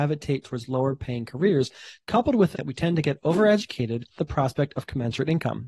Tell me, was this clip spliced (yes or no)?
yes